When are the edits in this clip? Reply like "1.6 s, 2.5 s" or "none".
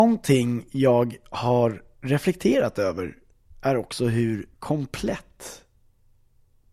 4.5 s